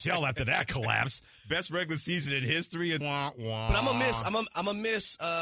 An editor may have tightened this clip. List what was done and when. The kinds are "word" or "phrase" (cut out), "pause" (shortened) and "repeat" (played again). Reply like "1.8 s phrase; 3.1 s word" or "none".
3.0 s word